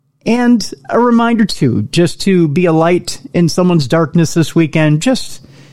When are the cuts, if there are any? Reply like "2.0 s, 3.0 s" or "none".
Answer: none